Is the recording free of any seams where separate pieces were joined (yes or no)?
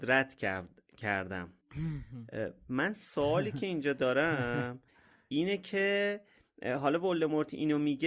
yes